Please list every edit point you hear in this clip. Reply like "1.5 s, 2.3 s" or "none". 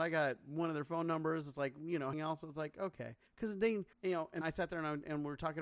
2.1 s, 3.3 s, 3.9 s, 4.4 s